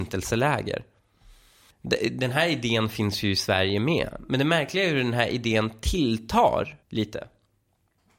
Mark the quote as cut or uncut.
cut